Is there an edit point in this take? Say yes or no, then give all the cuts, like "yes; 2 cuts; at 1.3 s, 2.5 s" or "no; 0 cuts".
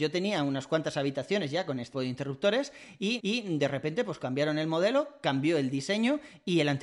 yes; 2 cuts; at 1.9 s, 3.2 s